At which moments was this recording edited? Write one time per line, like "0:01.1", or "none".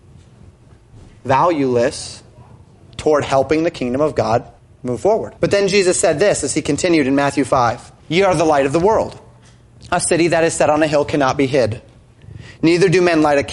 0:04.6
0:05.4
0:08.0